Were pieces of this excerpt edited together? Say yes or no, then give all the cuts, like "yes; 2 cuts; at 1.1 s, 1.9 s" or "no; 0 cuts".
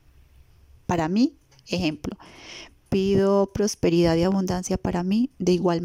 no; 0 cuts